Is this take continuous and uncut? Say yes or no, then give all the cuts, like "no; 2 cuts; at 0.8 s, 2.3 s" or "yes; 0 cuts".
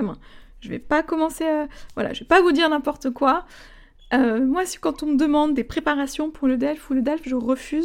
yes; 0 cuts